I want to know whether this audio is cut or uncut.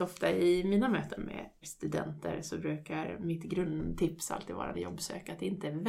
cut